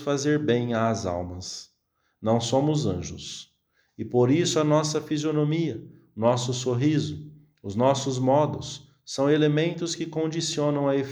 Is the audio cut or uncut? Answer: uncut